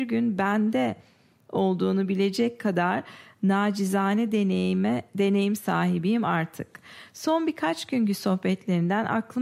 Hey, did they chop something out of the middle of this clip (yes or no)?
no